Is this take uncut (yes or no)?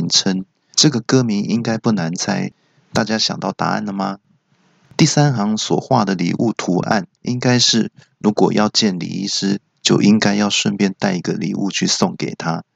yes